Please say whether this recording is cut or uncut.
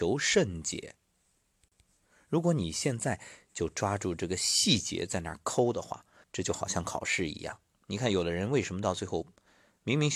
cut